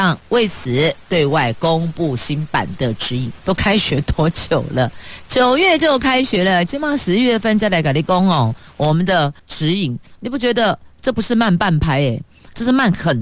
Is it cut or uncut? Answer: cut